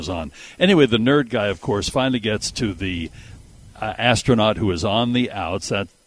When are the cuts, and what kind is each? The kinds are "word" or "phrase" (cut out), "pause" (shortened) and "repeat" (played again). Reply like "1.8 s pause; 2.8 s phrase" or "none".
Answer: none